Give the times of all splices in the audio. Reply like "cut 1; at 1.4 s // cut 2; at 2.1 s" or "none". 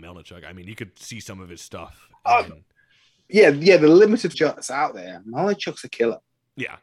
cut 1; at 4.3 s